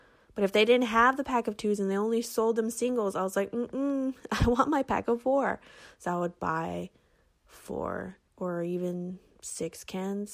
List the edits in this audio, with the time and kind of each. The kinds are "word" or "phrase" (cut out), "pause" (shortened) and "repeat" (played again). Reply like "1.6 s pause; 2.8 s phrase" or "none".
8.3 s pause